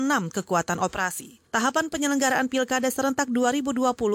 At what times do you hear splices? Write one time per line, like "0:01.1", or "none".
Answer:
0:01.5